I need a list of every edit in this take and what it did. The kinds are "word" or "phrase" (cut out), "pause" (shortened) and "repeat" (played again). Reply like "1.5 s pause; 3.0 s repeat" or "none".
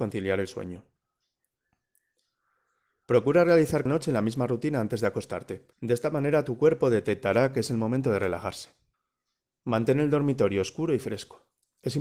3.9 s word; 5.7 s pause; 8.9 s pause